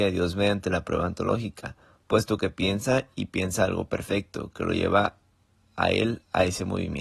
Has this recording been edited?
no; 0 cuts

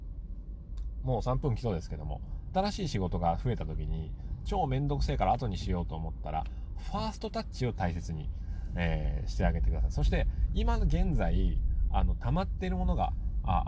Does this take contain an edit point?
yes; 1 cut; at 2.5 s

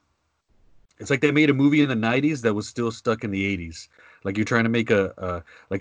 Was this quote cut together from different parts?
no; 0 cuts

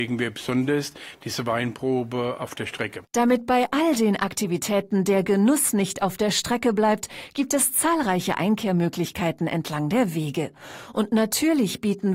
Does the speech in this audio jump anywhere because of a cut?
no; 0 cuts

